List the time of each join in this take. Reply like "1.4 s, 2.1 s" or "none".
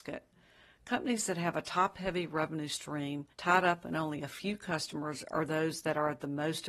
3.3 s